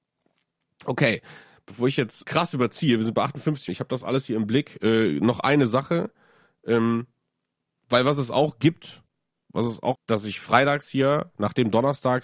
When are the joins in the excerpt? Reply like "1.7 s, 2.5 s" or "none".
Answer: 2.2 s, 3.7 s, 9.9 s

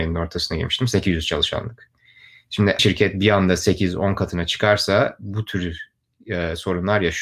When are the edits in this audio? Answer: 2.8 s

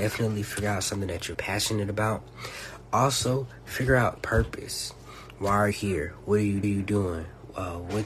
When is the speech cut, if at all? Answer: 1.3 s, 4.2 s, 5.7 s, 6.6 s

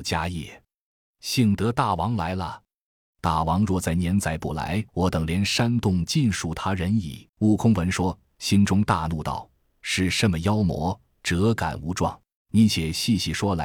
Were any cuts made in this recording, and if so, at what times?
4.9 s, 7.3 s, 12.4 s

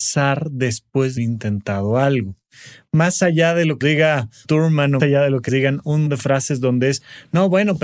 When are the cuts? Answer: 1.2 s, 3.8 s, 4.4 s, 5.0 s, 5.5 s, 6.1 s

